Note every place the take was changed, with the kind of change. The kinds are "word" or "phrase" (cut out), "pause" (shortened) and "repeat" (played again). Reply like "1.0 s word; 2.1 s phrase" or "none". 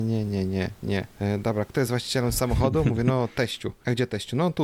none